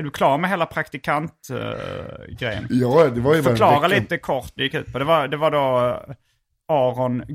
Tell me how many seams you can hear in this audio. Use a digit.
1